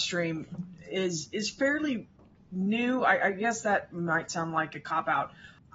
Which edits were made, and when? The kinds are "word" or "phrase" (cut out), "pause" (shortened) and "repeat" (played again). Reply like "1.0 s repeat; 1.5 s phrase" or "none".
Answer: none